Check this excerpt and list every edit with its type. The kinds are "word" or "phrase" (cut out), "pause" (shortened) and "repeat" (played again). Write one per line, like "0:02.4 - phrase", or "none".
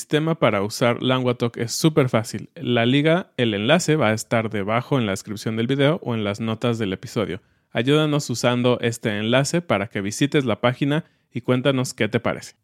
none